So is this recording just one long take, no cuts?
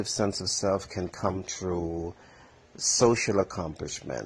yes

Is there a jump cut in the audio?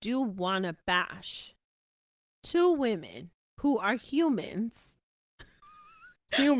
no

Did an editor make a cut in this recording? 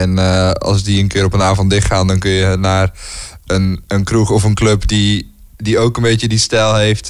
no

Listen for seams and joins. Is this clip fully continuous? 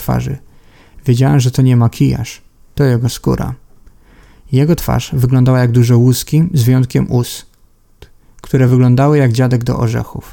yes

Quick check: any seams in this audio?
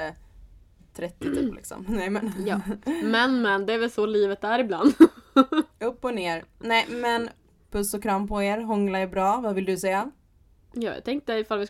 no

